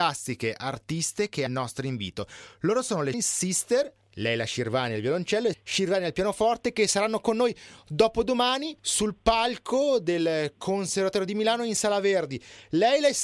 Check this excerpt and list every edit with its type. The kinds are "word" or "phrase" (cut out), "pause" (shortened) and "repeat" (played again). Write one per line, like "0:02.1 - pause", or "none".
0:01.5 - phrase
0:03.1 - word
0:05.5 - word
0:08.8 - pause